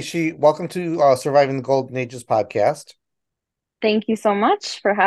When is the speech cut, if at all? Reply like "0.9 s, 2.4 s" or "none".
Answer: none